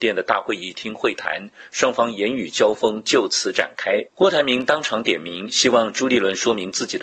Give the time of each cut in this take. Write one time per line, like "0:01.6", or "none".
0:04.1